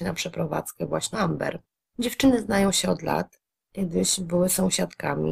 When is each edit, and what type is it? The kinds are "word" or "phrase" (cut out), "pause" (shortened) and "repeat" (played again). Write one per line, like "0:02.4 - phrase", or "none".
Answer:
0:01.1 - word

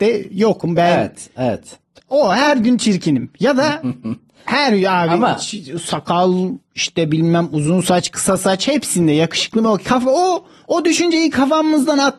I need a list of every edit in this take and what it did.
none

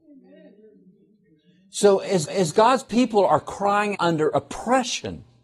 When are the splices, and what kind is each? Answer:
0:02.3 - repeat
0:03.9 - word

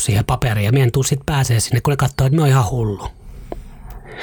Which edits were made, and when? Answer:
none

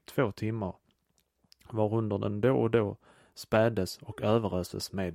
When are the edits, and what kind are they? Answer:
none

